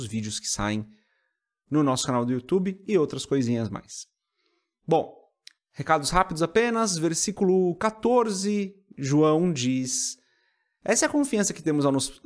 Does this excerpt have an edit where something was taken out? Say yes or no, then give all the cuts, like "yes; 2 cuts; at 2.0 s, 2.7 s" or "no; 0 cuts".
no; 0 cuts